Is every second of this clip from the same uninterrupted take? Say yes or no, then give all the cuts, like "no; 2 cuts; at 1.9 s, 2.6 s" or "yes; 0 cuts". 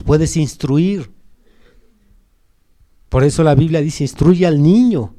yes; 0 cuts